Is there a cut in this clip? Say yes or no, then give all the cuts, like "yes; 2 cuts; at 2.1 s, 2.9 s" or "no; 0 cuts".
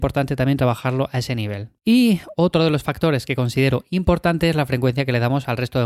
yes; 1 cut; at 1.8 s